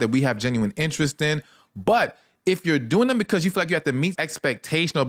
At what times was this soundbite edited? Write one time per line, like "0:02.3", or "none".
0:04.1